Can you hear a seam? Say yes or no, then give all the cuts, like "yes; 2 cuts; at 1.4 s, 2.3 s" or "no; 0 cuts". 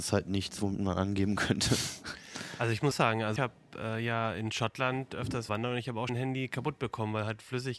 yes; 4 cuts; at 2.9 s, 3.4 s, 5.5 s, 6.1 s